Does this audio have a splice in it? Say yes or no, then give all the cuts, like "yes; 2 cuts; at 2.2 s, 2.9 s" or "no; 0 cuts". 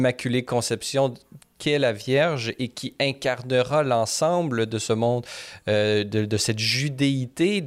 no; 0 cuts